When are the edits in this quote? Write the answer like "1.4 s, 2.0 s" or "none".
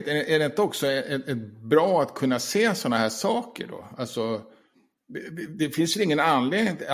none